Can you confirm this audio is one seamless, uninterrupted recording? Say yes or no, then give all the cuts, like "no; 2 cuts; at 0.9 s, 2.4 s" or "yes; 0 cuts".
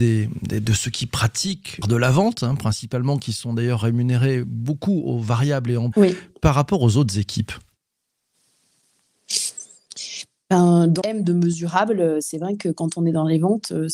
no; 3 cuts; at 1.8 s, 5.9 s, 11.0 s